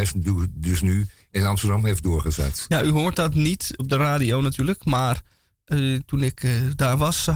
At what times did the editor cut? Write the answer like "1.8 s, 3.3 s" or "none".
3.8 s